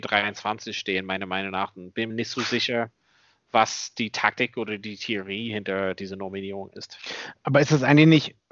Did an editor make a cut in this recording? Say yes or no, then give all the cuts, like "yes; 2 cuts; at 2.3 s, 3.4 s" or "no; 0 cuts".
yes; 1 cut; at 2.1 s